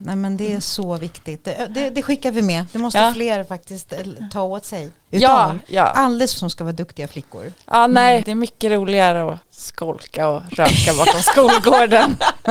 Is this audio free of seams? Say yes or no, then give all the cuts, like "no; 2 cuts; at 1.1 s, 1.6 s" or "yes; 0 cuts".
no; 1 cut; at 6.4 s